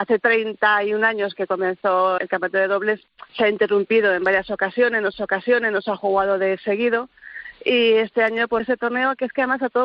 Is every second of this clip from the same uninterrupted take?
no; 4 cuts; at 2.2 s, 3.3 s, 5.1 s, 8.6 s

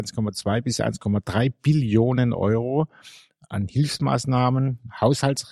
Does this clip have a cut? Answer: no; 0 cuts

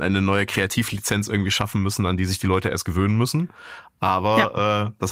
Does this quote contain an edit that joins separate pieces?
no; 0 cuts

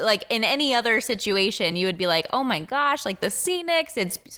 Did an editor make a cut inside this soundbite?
no; 0 cuts

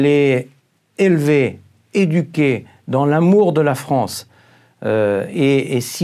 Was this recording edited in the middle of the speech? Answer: no; 0 cuts

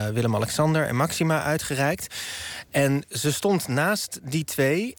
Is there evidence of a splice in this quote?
no; 0 cuts

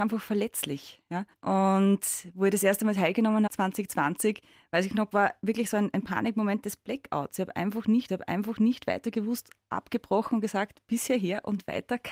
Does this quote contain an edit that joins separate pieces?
yes; 4 cuts; at 1.3 s, 3.5 s, 5.1 s, 8.1 s

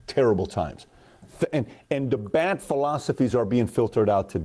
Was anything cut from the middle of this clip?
no; 0 cuts

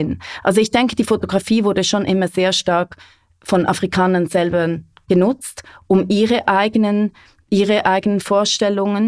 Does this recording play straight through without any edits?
yes; 0 cuts

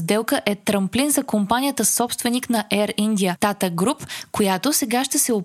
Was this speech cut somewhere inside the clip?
no; 0 cuts

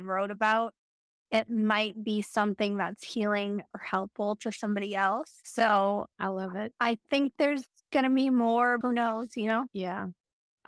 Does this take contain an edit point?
yes; 2 cuts; at 6.1 s, 8.8 s

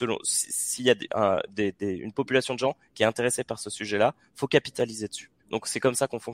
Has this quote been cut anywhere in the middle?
yes; 1 cut; at 5.4 s

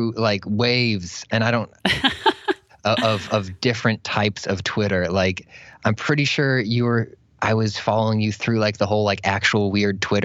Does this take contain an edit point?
no; 0 cuts

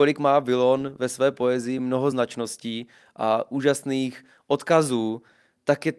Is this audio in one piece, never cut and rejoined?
yes; 0 cuts

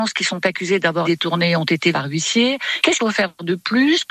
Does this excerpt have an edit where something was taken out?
yes; 3 cuts; at 1.0 s, 1.9 s, 3.0 s

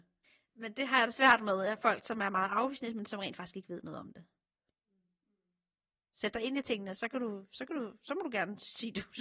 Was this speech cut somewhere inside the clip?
no; 0 cuts

